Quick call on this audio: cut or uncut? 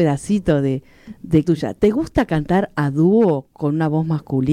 cut